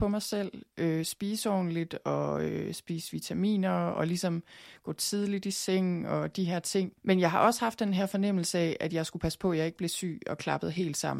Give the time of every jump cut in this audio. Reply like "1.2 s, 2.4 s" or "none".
7.0 s